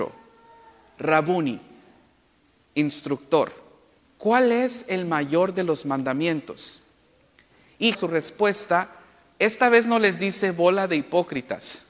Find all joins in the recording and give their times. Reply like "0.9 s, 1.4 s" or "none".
4.0 s, 7.9 s